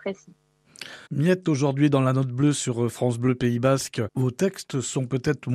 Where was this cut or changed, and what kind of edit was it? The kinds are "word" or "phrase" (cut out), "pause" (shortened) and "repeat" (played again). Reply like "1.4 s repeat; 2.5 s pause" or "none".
1.1 s pause